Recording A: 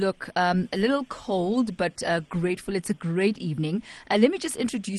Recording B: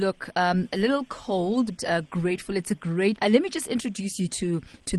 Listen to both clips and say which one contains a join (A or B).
B